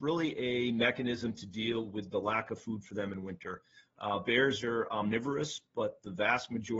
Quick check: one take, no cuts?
yes; 0 cuts

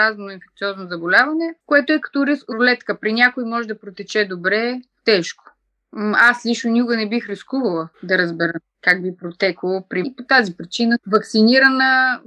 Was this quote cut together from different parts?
yes; 6 cuts; at 1.6 s, 2.5 s, 5.0 s, 7.9 s, 10.0 s, 11.0 s

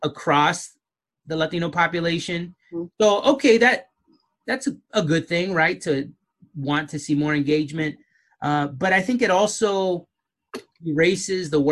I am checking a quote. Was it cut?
no; 0 cuts

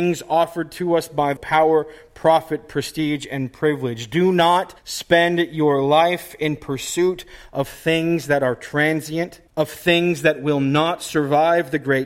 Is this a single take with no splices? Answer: no; 3 cuts; at 1.4 s, 4.8 s, 9.5 s

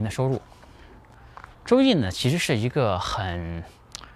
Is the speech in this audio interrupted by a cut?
yes; 1 cut; at 1.5 s

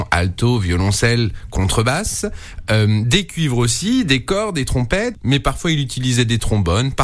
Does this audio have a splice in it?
no; 0 cuts

